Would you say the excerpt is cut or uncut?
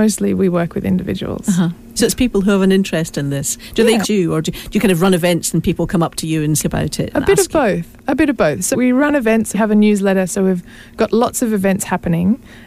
cut